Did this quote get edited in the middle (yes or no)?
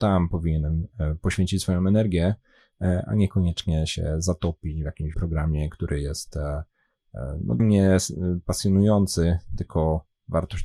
yes